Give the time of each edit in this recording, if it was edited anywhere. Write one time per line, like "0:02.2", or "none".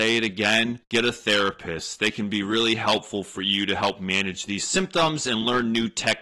none